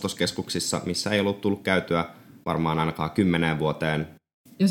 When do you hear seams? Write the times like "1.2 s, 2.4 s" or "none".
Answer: 2.4 s